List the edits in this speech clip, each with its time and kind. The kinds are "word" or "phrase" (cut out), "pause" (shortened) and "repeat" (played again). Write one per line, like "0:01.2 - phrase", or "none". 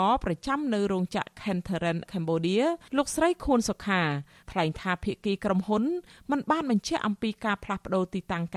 0:02.1 - word